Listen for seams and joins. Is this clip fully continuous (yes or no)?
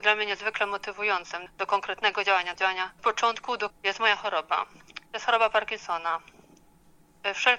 no